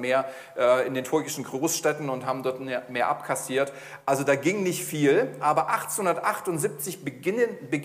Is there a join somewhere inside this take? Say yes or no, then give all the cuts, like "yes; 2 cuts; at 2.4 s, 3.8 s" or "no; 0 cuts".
no; 0 cuts